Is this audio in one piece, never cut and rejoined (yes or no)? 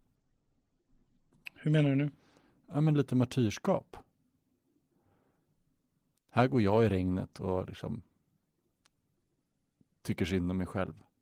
yes